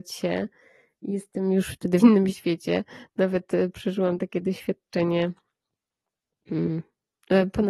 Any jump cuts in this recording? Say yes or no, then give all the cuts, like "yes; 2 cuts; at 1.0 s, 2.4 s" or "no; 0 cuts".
yes; 1 cut; at 2.0 s